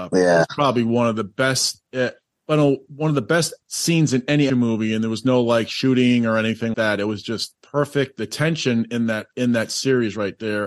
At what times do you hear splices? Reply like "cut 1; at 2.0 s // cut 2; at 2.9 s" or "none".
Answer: cut 1; at 2.3 s // cut 2; at 3.6 s // cut 3; at 4.5 s // cut 4; at 6.7 s